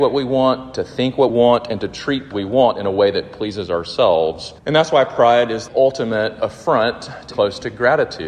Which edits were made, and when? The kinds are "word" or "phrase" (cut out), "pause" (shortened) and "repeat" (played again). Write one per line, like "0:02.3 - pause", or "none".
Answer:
0:01.3 - word
0:02.3 - phrase
0:04.6 - pause
0:05.7 - word
0:07.3 - word